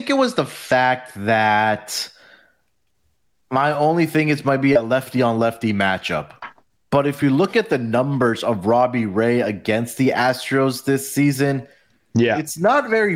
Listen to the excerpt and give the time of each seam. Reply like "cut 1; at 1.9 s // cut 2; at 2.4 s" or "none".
none